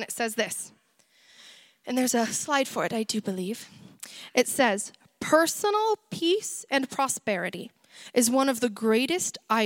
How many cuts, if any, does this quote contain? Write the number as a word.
zero